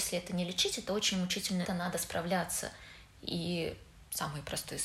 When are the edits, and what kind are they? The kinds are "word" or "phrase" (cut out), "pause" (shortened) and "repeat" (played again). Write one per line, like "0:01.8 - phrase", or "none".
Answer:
0:01.7 - phrase